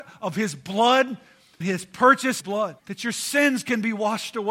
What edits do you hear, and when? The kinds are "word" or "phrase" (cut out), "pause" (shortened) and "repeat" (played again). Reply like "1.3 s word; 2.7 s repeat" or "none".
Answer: 1.6 s word; 2.4 s phrase; 2.8 s pause